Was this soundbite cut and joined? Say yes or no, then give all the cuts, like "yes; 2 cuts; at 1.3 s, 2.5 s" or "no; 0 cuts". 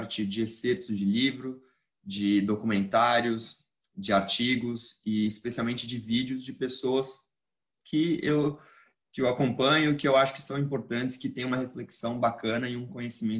no; 0 cuts